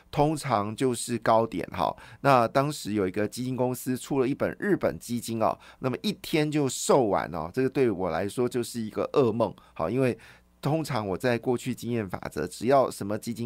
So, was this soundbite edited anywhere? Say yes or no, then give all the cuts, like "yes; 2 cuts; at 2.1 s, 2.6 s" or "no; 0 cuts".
no; 0 cuts